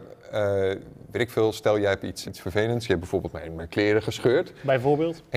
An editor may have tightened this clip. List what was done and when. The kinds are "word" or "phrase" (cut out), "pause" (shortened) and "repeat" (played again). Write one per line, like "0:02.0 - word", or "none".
0:02.2 - word